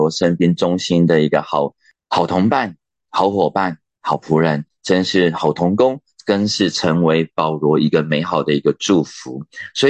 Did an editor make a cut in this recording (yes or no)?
no